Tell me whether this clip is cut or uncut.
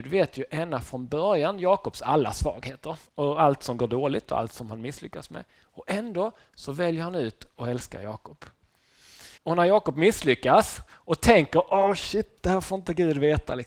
cut